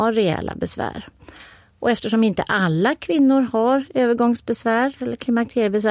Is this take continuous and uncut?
yes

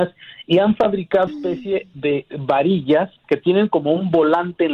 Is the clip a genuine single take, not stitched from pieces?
no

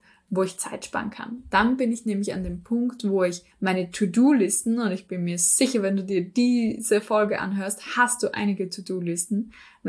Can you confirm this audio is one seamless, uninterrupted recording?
no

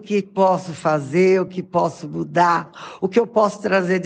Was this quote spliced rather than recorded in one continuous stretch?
no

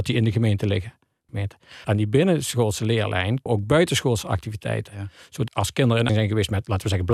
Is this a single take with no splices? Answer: no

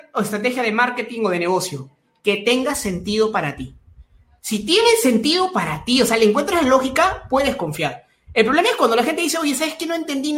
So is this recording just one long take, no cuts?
yes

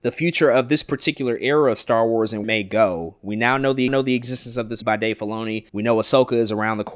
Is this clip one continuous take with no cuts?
no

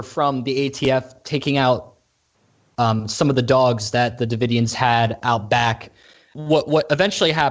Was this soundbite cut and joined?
no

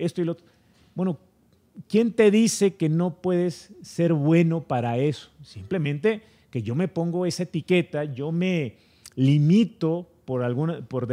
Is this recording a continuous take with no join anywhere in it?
yes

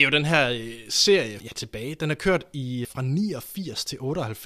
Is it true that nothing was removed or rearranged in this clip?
no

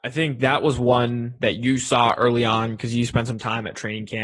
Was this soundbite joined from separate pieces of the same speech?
no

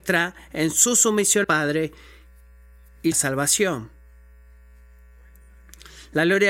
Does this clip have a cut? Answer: yes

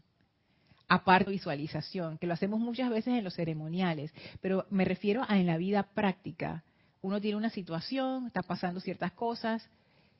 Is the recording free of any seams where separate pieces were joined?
no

